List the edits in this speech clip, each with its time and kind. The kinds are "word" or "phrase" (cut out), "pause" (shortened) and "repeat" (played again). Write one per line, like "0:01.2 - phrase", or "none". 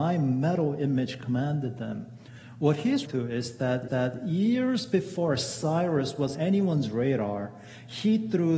0:03.1 - word
0:03.9 - repeat
0:06.3 - word